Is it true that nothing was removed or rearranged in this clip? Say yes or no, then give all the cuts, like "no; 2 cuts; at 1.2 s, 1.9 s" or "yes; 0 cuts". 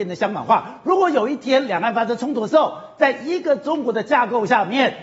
yes; 0 cuts